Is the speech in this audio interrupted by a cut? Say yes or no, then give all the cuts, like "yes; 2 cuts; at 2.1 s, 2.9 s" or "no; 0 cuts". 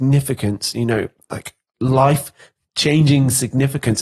no; 0 cuts